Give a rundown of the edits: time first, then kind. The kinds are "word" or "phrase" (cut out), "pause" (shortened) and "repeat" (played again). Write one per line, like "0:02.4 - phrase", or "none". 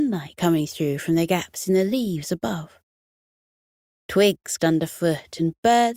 0:04.6 - word